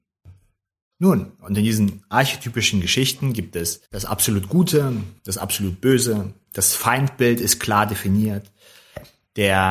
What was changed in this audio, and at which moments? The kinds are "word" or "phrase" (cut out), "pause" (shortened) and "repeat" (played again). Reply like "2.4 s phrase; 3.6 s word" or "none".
3.9 s pause; 5.2 s pause